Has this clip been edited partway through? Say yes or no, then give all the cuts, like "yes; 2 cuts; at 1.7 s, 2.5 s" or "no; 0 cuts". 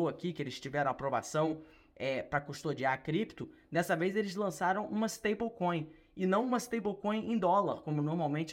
no; 0 cuts